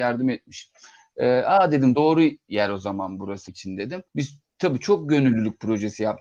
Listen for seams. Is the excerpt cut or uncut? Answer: cut